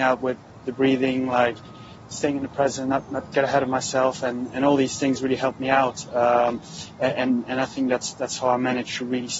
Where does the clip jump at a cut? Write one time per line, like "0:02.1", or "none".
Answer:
none